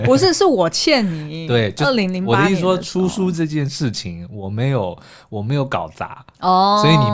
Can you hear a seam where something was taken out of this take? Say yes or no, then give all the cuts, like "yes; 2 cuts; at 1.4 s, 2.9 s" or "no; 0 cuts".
no; 0 cuts